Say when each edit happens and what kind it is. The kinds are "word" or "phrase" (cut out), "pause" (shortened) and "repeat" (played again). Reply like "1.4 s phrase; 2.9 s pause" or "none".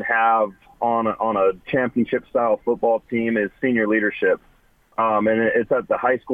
1.6 s pause